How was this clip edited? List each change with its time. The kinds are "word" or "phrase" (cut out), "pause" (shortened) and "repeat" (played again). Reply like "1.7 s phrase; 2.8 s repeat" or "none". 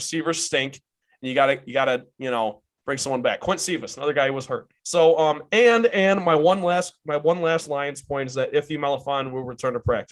4.8 s pause